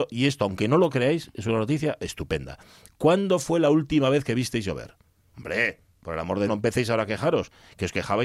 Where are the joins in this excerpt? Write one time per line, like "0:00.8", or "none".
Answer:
0:06.5